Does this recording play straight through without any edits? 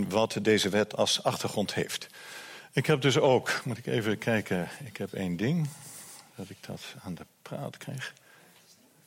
yes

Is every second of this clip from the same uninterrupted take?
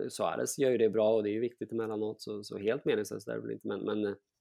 yes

